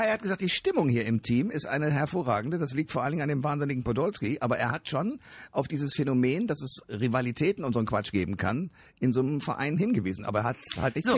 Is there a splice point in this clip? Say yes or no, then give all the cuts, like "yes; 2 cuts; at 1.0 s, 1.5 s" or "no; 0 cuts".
no; 0 cuts